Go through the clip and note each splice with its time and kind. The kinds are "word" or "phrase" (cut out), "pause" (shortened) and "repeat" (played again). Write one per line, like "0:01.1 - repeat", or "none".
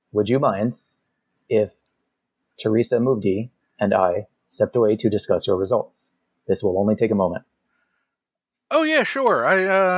none